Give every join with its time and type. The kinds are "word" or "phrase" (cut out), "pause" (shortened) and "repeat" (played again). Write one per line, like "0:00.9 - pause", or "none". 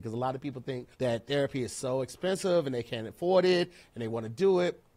0:00.9 - pause